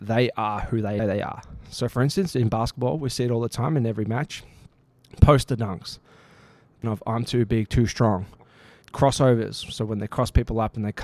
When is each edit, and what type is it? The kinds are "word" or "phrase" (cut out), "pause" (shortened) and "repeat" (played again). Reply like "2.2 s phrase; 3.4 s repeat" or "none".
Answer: 1.0 s word; 6.8 s word; 8.8 s phrase